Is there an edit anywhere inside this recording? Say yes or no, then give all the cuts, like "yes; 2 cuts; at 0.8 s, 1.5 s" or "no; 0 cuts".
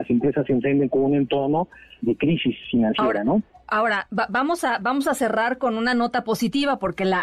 no; 0 cuts